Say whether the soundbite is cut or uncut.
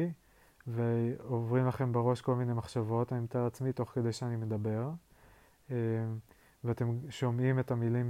uncut